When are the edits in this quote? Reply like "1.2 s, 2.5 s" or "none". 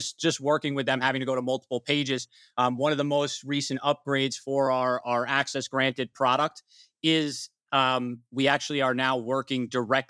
none